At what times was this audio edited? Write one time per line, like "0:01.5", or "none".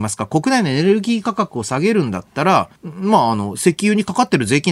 0:02.8